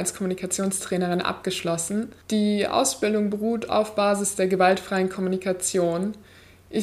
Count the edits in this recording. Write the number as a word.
one